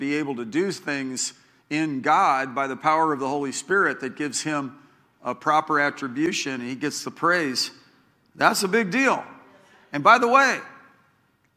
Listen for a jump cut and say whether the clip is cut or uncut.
uncut